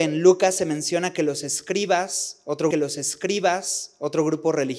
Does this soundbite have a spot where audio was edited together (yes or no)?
yes